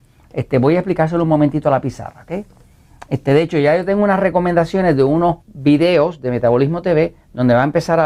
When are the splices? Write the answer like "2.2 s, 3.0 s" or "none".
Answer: 5.4 s